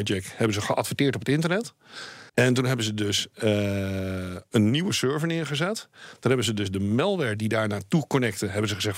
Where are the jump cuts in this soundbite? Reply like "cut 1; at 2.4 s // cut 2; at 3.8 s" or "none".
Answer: cut 1; at 2.3 s